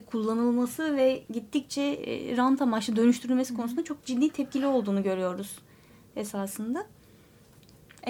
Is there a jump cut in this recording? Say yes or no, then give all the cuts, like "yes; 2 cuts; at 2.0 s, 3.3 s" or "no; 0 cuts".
no; 0 cuts